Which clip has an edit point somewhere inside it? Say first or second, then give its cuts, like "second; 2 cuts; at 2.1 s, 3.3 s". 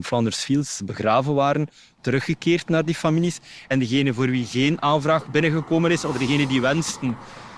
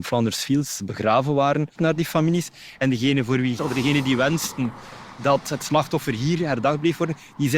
second; 2 cuts; at 1.7 s, 3.6 s